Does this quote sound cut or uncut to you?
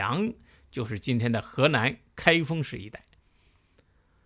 uncut